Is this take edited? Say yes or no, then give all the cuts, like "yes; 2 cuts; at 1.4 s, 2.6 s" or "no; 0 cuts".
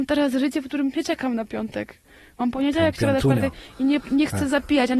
yes; 2 cuts; at 2.9 s, 4.0 s